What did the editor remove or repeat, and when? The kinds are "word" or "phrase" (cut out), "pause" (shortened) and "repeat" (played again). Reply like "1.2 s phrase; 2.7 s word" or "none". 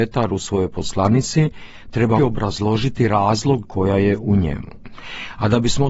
2.2 s word; 3.6 s word